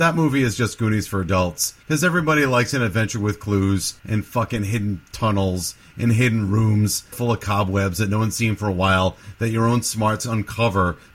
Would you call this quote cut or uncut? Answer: cut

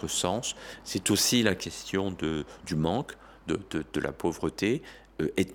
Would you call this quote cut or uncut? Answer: uncut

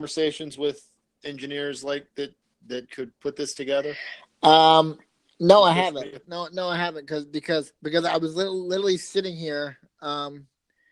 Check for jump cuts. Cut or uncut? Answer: cut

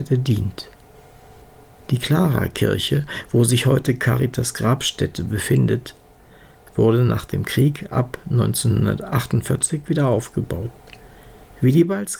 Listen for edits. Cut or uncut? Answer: uncut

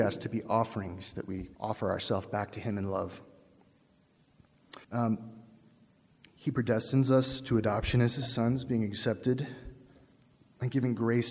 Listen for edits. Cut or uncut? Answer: cut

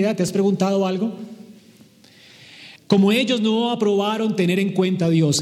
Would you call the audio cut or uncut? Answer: cut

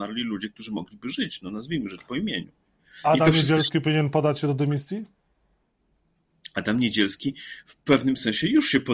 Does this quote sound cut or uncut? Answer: uncut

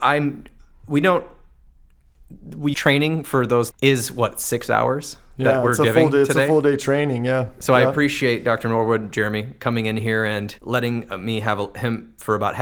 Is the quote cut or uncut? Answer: cut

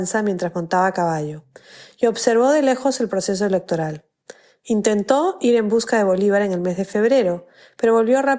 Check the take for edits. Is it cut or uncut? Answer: uncut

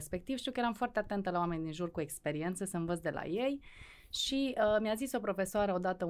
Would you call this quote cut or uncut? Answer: uncut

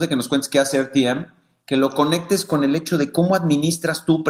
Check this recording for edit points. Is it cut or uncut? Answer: uncut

